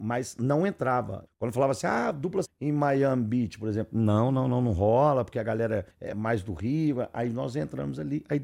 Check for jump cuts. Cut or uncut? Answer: cut